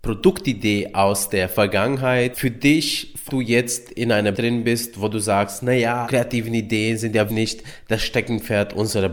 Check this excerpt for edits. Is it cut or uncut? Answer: cut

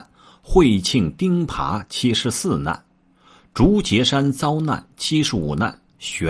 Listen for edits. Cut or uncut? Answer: uncut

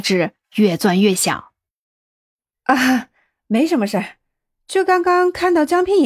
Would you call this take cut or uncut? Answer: uncut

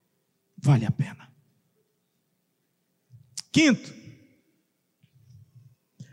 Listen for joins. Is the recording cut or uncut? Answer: uncut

